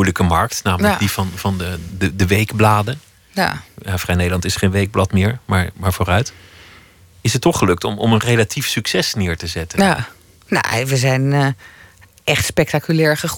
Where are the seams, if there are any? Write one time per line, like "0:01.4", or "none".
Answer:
none